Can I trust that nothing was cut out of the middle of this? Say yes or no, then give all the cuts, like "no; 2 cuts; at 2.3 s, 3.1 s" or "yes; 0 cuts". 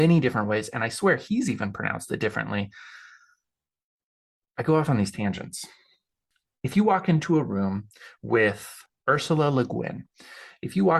yes; 0 cuts